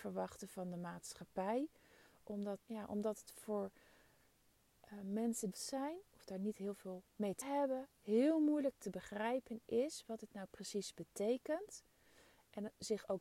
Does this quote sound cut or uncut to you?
cut